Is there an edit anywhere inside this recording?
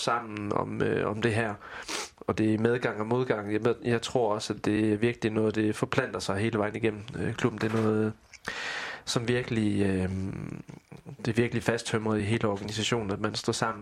no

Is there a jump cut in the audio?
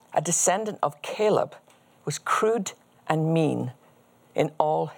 no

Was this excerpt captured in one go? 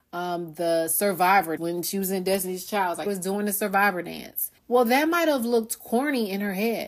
no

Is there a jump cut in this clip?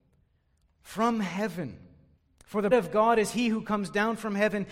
yes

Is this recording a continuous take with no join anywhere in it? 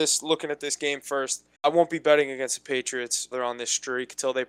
no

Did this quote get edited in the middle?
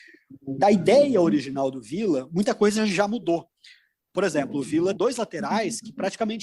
yes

